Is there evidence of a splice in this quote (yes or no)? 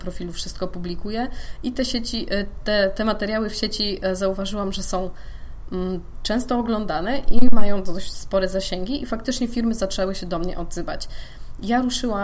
no